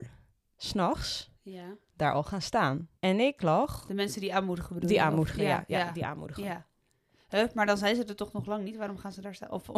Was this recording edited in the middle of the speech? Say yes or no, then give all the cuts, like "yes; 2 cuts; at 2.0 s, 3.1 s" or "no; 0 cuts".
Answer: yes; 1 cut; at 3.0 s